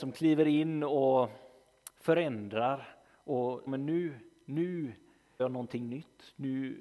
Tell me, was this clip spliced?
yes; 2 cuts; at 3.7 s, 5.4 s

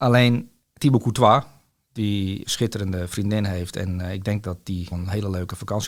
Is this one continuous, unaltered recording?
no; 2 cuts; at 2.4 s, 4.9 s

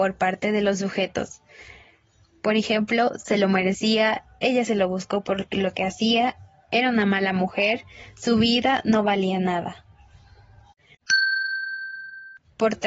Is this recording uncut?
yes; 0 cuts

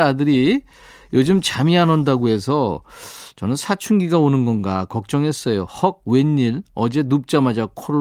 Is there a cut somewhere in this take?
no; 0 cuts

